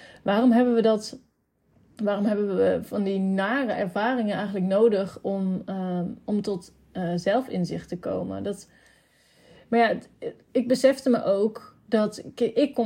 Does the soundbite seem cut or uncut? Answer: uncut